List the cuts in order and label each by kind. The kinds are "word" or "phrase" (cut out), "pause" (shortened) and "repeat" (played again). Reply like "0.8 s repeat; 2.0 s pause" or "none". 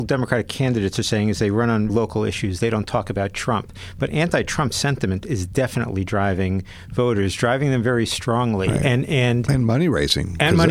1.9 s word

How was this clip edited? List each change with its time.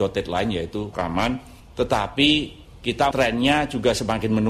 0.9 s phrase; 3.1 s word

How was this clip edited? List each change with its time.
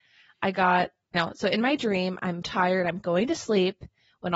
1.1 s word; 2.4 s word

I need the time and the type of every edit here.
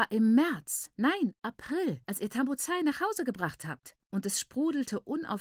2.0 s pause; 4.0 s pause

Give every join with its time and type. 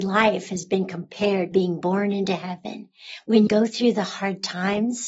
1.5 s phrase; 3.5 s word

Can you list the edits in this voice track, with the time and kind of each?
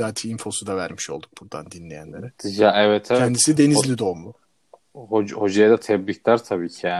none

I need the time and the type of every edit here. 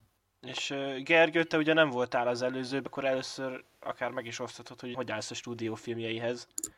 2.9 s word; 4.9 s word

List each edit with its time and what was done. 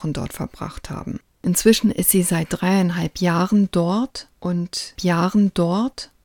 5.0 s repeat

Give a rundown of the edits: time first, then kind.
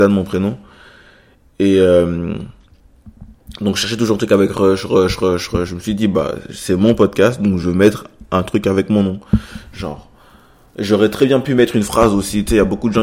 none

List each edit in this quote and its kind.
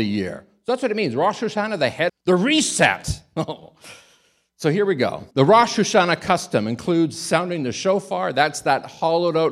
2.1 s phrase; 5.3 s pause

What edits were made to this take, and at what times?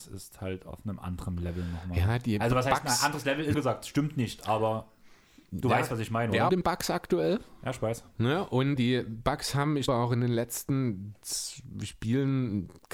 3.5 s word; 6.5 s phrase; 8.8 s word; 9.9 s word

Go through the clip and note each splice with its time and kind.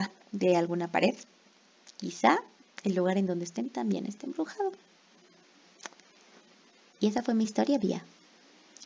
none

